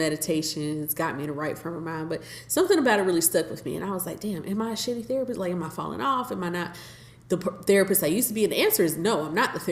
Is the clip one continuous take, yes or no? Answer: yes